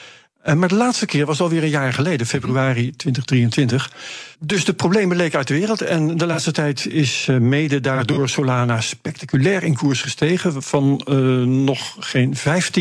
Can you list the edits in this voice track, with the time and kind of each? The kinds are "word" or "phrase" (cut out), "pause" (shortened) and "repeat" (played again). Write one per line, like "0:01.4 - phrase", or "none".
0:04.3 - pause